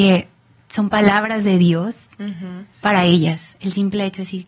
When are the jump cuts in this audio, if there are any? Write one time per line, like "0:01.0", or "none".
0:02.7